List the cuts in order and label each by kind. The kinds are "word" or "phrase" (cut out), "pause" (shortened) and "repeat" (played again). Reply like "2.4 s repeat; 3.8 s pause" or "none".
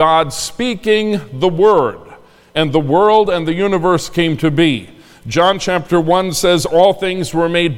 none